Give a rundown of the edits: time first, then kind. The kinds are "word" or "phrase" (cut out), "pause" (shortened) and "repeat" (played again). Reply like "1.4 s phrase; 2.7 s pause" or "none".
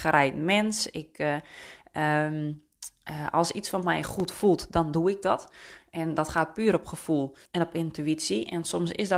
7.5 s pause

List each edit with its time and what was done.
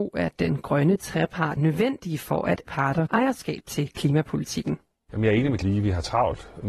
1.6 s word; 2.6 s word; 3.1 s word; 5.6 s word

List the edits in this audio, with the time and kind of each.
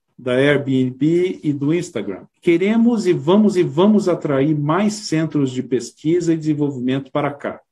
2.3 s pause; 3.5 s repeat

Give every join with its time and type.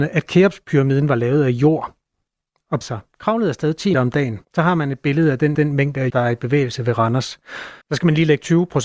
2.8 s word; 3.9 s word; 4.4 s pause; 5.5 s repeat; 6.1 s word; 7.8 s pause

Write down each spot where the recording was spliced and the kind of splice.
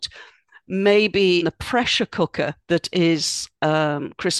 1.4 s word; 2.6 s pause

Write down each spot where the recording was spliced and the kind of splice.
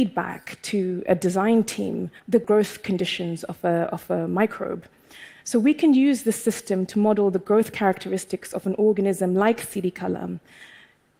2.2 s pause

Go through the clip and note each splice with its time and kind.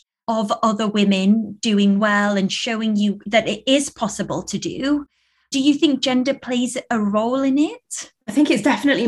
none

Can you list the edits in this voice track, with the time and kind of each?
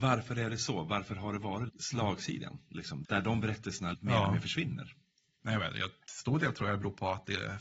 1.7 s word; 3.0 s word; 3.9 s word

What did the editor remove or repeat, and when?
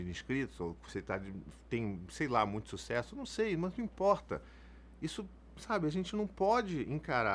none

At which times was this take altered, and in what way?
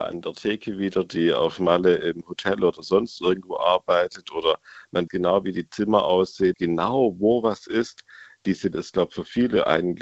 5.1 s word; 6.5 s word; 8.7 s word

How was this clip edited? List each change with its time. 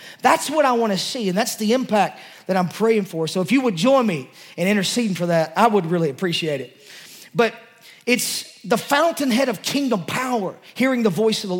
none

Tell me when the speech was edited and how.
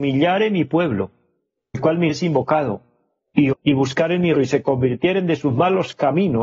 1.7 s word; 2.1 s word; 3.5 s word; 4.3 s word

